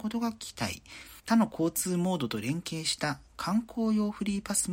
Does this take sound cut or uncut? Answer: cut